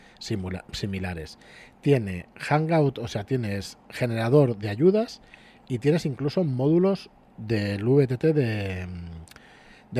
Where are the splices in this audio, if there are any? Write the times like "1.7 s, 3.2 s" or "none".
none